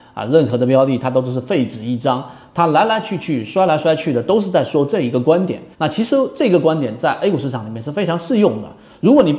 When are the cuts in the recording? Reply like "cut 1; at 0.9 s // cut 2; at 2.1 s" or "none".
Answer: cut 1; at 5.7 s